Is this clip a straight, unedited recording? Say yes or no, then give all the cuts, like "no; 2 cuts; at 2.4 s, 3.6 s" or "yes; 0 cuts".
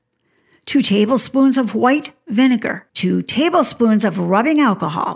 no; 1 cut; at 2.9 s